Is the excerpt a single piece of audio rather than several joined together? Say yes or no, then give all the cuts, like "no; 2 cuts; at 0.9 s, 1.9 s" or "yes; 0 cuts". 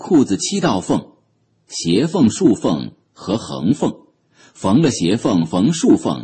yes; 0 cuts